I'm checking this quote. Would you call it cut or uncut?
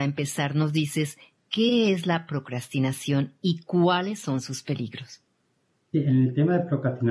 uncut